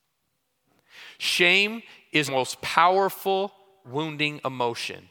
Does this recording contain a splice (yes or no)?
yes